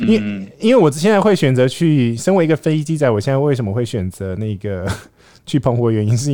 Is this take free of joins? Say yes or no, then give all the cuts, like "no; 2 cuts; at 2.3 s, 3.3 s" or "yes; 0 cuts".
yes; 0 cuts